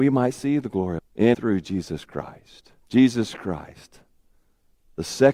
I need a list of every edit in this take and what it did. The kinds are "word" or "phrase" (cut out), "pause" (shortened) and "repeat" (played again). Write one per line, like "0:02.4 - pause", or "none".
0:01.0 - phrase
0:01.3 - word
0:02.8 - pause